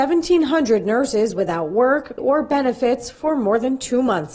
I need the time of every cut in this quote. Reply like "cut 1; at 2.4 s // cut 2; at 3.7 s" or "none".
cut 1; at 2.2 s